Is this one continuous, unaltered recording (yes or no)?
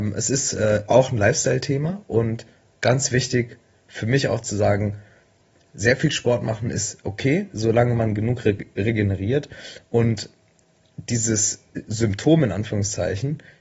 yes